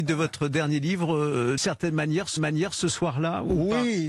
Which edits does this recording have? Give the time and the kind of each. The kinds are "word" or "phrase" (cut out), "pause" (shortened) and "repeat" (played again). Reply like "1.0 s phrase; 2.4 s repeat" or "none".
1.6 s word; 2.4 s repeat